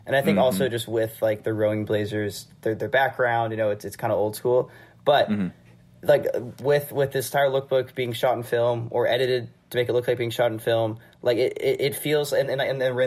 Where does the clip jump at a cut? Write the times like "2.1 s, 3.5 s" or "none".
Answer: none